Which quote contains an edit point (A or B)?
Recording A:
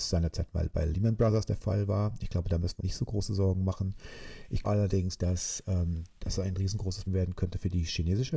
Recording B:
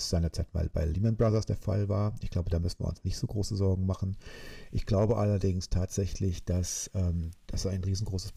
A